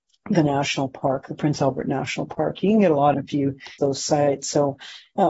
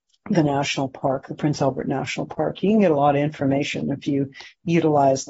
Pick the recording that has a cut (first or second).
first